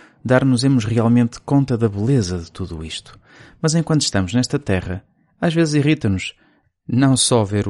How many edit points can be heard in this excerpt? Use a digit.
0